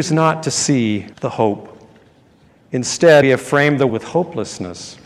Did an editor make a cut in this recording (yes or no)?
yes